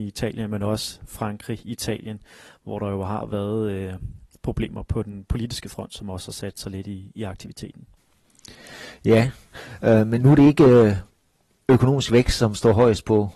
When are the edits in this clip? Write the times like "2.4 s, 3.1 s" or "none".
none